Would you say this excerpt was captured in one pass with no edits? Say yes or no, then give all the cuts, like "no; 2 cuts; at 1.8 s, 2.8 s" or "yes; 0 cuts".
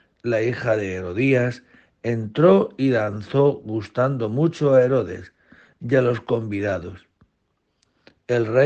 yes; 0 cuts